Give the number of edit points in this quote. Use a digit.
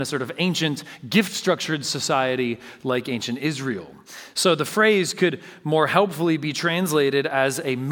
0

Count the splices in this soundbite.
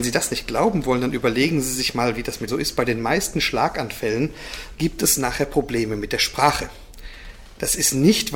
2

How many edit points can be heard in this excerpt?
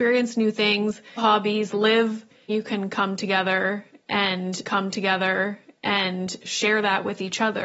4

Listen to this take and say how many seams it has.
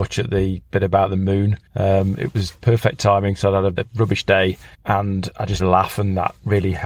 5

